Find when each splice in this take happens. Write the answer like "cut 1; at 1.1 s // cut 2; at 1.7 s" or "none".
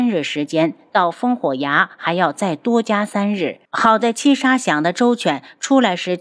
cut 1; at 3.6 s